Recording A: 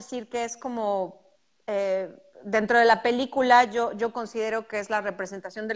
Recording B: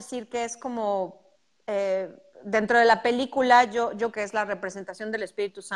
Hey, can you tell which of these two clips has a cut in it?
B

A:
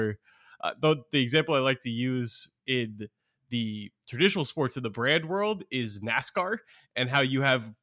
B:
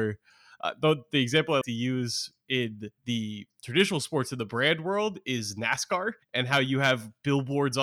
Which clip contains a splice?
B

